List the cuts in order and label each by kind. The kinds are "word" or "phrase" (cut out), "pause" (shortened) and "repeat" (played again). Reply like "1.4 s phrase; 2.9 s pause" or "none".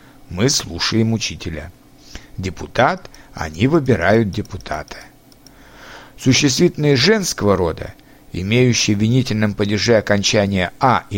none